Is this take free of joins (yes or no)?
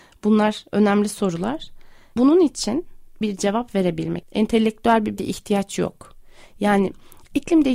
no